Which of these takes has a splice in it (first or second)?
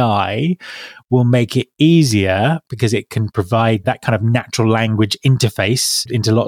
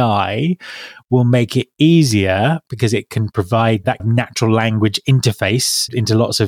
second